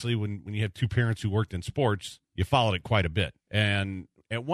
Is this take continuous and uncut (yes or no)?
no